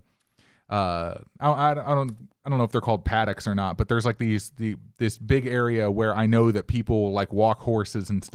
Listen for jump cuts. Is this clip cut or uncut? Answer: uncut